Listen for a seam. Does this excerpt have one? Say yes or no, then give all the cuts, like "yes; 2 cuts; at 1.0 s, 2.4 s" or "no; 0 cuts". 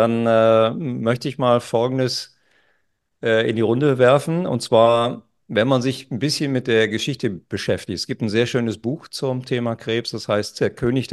no; 0 cuts